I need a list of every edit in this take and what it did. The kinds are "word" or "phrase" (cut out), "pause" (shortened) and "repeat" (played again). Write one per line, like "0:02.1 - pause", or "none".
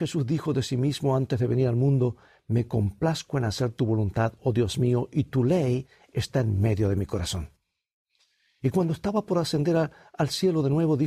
none